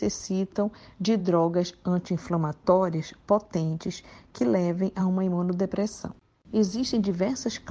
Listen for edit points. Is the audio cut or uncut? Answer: uncut